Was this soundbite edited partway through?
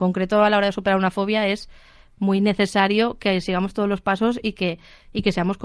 no; 0 cuts

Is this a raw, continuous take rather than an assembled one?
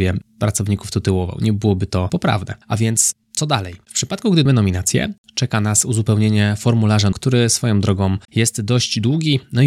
no; 5 cuts; at 2.6 s, 3.2 s, 4.5 s, 7.1 s, 8.2 s

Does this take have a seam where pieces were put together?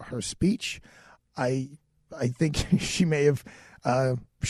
no; 0 cuts

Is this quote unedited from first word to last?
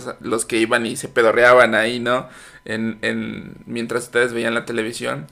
yes; 0 cuts

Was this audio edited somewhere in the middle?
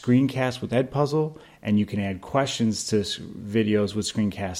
no; 0 cuts

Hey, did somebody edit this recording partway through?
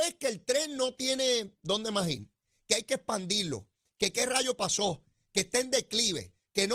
no; 0 cuts

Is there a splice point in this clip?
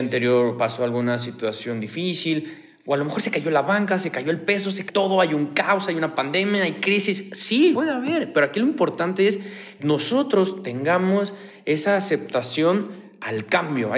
yes; 3 cuts; at 4.9 s, 7.7 s, 9.8 s

